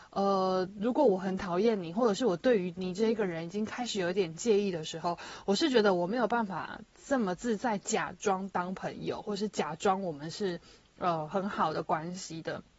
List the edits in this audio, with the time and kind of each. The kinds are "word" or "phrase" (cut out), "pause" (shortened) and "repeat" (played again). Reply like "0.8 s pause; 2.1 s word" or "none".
none